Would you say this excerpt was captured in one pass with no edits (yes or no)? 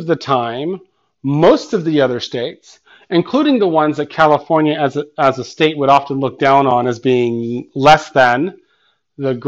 yes